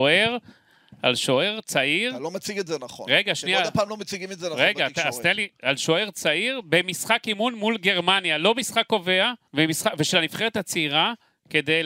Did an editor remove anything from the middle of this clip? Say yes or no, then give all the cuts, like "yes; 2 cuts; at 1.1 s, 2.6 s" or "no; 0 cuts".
yes; 1 cut; at 9.4 s